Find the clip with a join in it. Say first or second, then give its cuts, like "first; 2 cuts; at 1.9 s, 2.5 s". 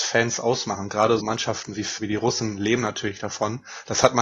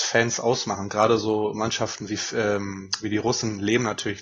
first; 2 cuts; at 1.2 s, 2.0 s